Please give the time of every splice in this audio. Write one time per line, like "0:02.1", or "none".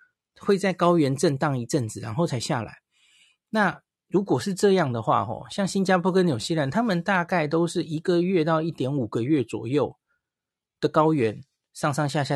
none